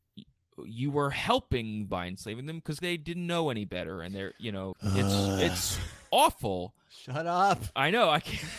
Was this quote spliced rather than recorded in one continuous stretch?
yes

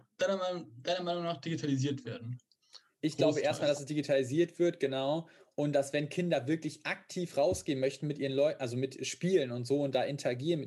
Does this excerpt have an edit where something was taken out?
no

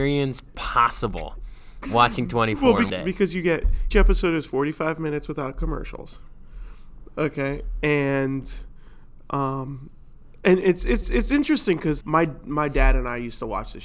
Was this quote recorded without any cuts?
no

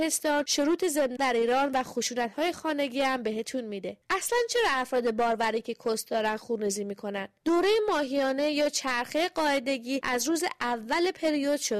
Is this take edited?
yes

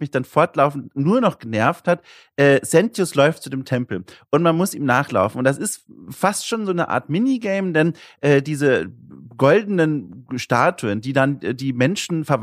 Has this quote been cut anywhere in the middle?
no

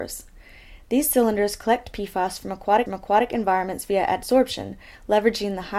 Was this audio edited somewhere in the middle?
yes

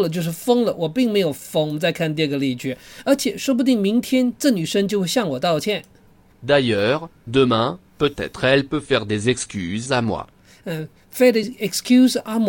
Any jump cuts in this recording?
no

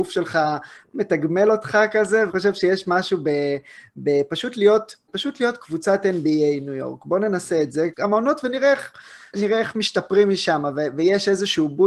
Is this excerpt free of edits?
no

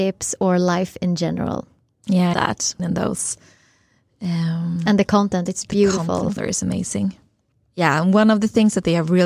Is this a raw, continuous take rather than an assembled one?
no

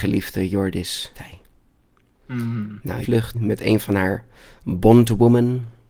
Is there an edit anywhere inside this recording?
yes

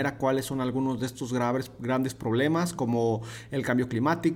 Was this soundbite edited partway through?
no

